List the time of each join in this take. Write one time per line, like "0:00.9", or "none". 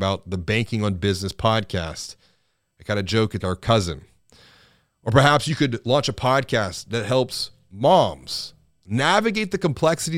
0:03.4